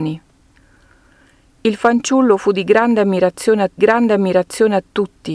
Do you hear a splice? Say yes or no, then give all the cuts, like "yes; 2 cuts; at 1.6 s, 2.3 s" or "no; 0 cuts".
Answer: yes; 1 cut; at 3.8 s